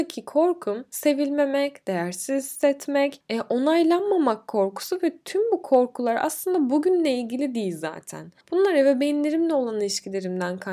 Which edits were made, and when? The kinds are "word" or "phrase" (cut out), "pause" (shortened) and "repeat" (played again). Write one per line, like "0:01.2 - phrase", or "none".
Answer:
0:08.4 - pause